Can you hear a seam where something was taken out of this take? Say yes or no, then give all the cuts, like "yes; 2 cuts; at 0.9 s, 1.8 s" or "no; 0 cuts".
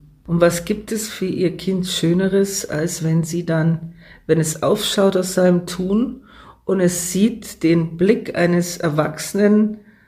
no; 0 cuts